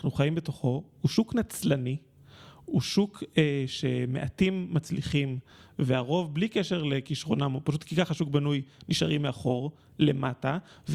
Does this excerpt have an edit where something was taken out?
no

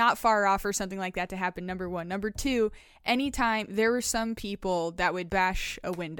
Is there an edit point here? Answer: yes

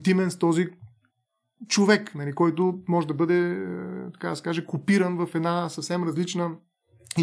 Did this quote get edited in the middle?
no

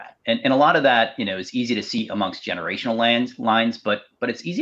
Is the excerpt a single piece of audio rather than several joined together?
yes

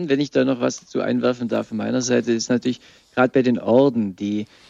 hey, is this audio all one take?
yes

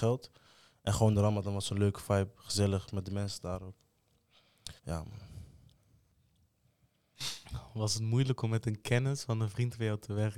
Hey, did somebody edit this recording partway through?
yes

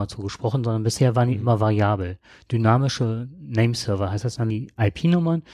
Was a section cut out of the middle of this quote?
yes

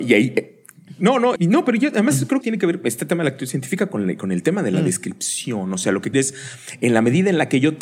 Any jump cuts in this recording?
yes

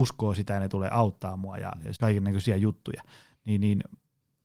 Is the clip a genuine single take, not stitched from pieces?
no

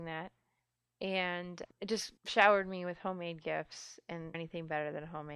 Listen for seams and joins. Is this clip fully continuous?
no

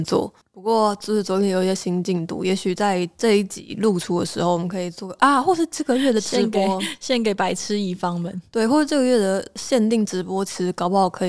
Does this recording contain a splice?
no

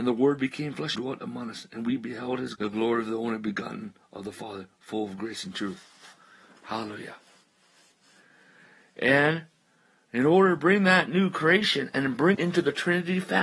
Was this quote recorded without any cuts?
no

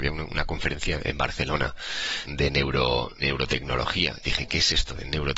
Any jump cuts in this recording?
yes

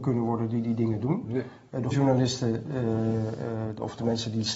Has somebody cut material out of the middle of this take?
yes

